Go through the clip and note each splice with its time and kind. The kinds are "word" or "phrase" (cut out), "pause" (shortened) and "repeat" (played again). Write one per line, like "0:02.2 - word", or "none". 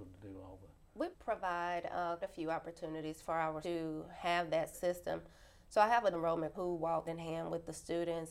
0:01.1 - word
0:02.2 - word
0:03.6 - word
0:04.7 - word
0:06.1 - word
0:06.5 - word
0:07.1 - word